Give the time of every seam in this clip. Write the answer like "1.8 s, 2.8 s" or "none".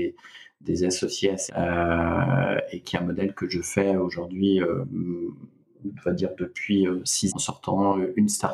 1.5 s, 7.3 s